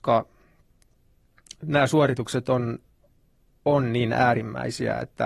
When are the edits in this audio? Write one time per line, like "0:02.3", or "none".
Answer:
none